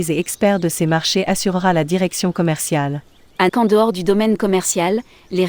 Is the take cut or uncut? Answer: cut